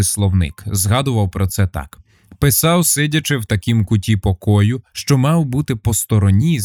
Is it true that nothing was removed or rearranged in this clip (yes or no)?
yes